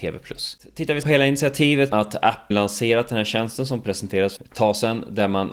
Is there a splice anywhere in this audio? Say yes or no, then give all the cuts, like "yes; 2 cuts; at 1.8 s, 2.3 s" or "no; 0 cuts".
yes; 4 cuts; at 1.0 s, 1.9 s, 2.5 s, 4.4 s